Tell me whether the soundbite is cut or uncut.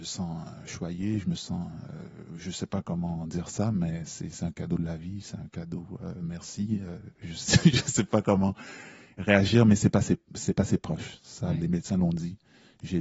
uncut